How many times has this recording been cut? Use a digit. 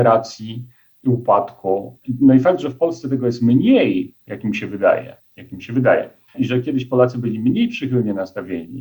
2